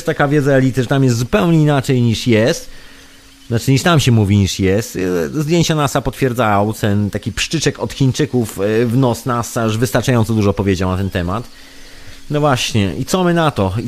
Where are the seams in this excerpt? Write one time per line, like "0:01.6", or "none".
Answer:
none

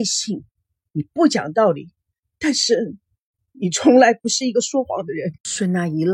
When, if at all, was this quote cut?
none

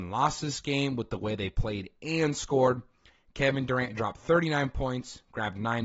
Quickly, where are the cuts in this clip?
none

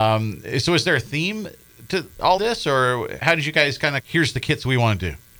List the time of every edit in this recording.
0:02.4
0:03.2
0:04.0

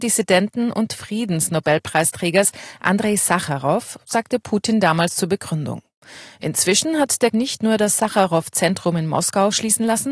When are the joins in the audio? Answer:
0:07.3

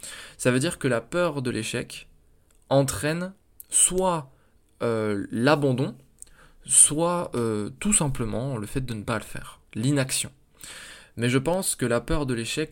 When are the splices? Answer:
none

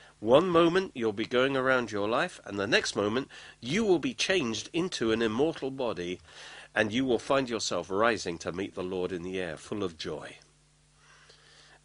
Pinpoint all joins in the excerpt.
none

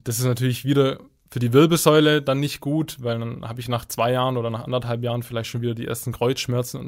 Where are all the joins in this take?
none

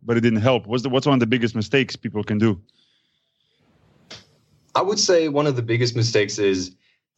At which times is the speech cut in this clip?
none

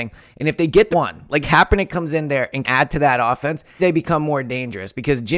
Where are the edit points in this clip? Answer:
0:00.9
0:01.4
0:02.6
0:03.8

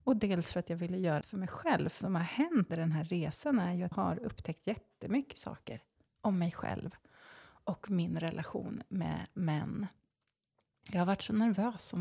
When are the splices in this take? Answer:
0:01.2
0:02.0
0:02.7
0:03.9

